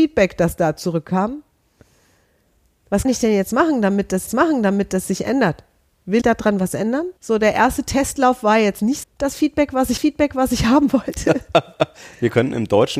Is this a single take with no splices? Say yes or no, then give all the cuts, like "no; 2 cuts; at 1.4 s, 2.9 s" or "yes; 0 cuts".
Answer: no; 6 cuts; at 3.0 s, 4.3 s, 6.2 s, 7.2 s, 9.0 s, 10.0 s